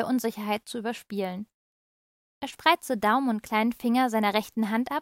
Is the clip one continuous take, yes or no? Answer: yes